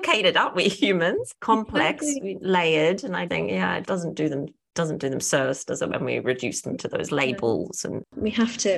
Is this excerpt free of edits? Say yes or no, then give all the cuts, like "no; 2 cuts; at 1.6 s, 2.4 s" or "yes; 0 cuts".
no; 2 cuts; at 3.3 s, 3.8 s